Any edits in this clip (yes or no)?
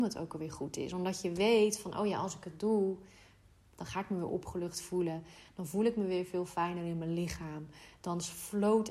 no